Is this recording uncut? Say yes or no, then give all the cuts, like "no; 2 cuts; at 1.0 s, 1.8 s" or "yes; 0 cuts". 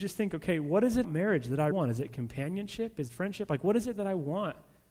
no; 3 cuts; at 1.0 s, 1.7 s, 3.1 s